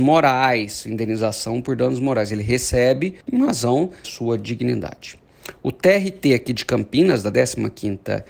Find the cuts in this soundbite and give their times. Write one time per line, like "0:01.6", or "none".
0:03.2
0:04.0